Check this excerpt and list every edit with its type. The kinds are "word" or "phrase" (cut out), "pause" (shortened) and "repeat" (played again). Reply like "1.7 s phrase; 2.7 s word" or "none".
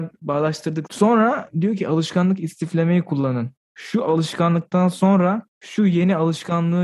5.5 s pause